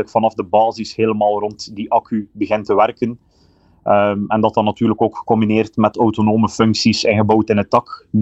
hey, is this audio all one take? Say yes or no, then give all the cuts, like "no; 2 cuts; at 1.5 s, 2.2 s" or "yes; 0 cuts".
yes; 0 cuts